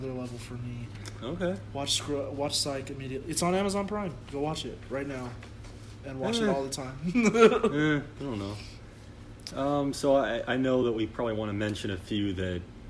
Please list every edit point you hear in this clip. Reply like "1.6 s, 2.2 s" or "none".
none